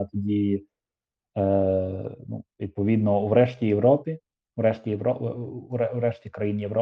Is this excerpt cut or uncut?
uncut